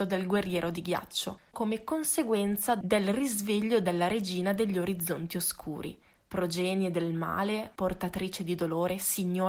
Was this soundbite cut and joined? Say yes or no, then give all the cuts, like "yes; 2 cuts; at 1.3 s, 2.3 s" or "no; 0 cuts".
no; 0 cuts